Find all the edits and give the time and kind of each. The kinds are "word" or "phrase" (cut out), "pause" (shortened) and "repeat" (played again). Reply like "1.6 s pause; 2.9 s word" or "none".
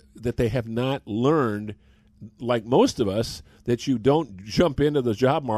none